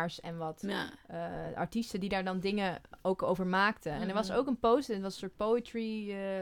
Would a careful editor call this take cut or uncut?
uncut